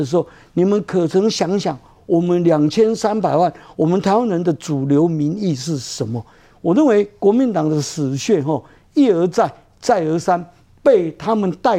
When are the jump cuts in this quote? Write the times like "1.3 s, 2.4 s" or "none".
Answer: none